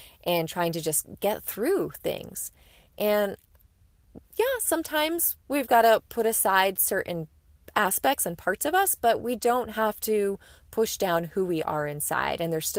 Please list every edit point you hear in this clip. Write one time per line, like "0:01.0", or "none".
none